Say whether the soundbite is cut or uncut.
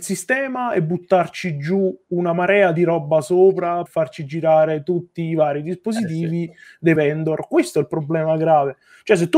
cut